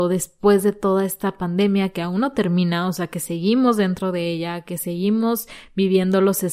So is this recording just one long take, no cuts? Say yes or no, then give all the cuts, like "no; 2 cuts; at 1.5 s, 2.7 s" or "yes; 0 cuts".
yes; 0 cuts